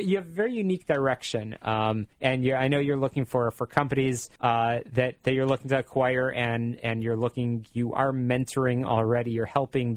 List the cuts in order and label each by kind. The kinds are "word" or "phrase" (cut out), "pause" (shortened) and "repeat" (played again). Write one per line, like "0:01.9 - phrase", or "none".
0:02.1 - pause
0:04.4 - pause